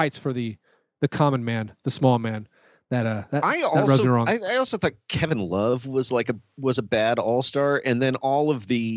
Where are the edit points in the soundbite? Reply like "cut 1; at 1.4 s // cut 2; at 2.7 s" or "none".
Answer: none